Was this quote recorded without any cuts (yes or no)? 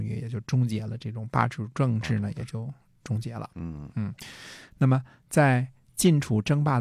yes